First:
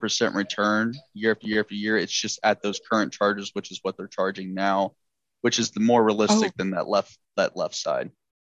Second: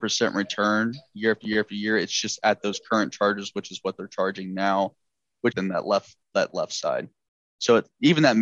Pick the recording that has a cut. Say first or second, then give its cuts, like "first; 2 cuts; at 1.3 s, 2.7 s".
second; 1 cut; at 5.5 s